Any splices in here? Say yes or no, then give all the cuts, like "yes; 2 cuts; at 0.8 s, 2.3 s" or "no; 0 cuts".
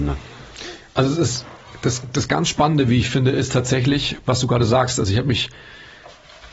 no; 0 cuts